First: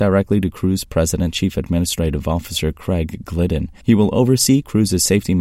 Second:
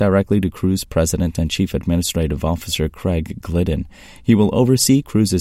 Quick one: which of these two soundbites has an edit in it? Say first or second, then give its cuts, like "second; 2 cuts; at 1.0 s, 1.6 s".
first; 2 cuts; at 1.3 s, 3.8 s